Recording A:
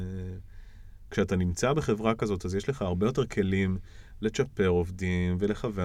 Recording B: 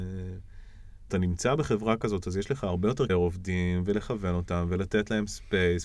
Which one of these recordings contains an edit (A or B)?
B